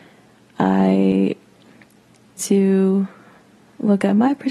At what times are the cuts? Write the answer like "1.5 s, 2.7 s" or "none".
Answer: 2.4 s